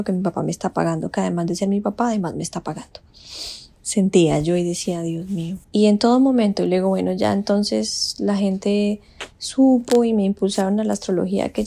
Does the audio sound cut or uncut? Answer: cut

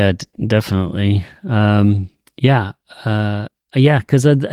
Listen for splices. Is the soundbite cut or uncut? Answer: uncut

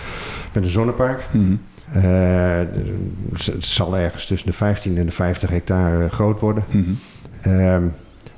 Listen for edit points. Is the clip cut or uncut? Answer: cut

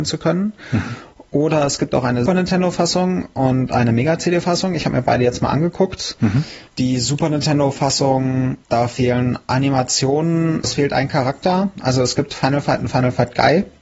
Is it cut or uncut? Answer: cut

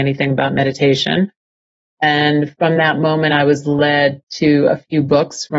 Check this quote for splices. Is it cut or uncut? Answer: uncut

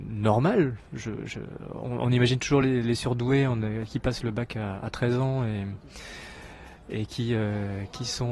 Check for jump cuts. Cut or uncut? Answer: uncut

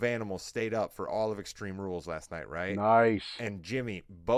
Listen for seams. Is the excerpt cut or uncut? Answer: uncut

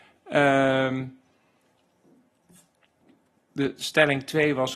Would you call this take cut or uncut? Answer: uncut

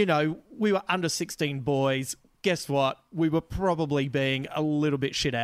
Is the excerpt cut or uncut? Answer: uncut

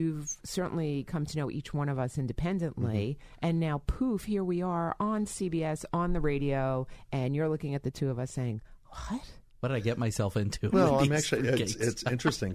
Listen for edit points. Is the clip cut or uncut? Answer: cut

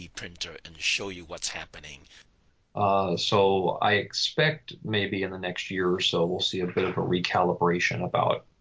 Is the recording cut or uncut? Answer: uncut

